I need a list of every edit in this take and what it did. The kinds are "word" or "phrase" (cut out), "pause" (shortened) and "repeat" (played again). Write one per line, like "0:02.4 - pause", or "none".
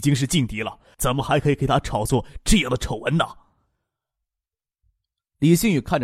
0:00.9 - pause